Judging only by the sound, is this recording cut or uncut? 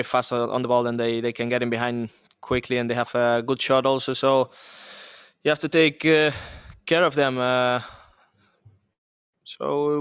uncut